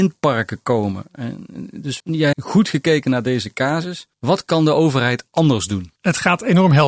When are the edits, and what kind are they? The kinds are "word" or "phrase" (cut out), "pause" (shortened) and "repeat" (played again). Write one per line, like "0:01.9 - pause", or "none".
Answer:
0:02.0 - word
0:02.3 - word
0:04.1 - pause
0:05.9 - pause